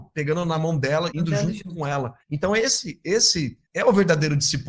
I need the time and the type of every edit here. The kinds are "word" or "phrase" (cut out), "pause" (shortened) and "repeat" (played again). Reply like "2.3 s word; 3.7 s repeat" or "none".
1.1 s word; 2.2 s pause; 3.6 s pause